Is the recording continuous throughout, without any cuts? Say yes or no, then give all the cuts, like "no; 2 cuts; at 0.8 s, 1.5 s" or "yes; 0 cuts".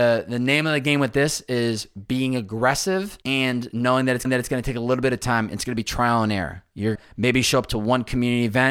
no; 3 cuts; at 3.2 s, 4.2 s, 6.9 s